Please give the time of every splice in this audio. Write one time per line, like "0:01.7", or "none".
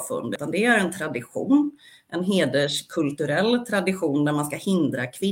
none